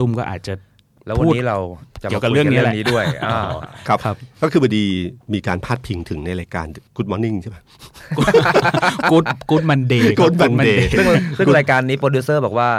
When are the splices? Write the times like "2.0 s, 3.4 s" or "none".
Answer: 6.9 s